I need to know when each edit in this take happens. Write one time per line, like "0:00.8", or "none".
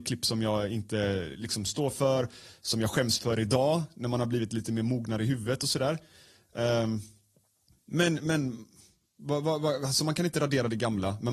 none